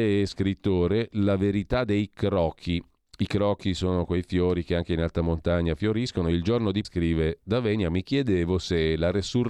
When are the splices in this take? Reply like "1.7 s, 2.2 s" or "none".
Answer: 6.8 s